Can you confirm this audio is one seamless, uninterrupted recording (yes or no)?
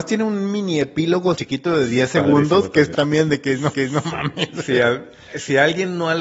no